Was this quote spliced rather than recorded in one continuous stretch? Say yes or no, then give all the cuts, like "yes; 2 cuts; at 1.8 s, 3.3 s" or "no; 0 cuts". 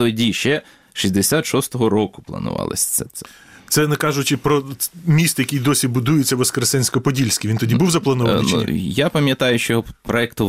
no; 0 cuts